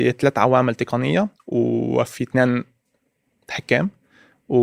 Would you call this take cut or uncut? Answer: uncut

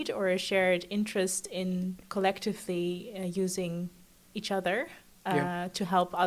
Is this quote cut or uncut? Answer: uncut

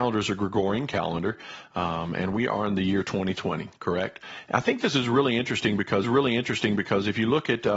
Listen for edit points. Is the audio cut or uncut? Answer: cut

